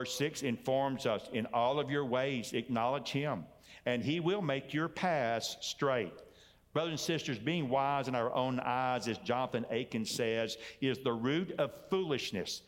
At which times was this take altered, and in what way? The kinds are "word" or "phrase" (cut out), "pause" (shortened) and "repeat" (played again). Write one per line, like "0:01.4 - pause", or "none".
none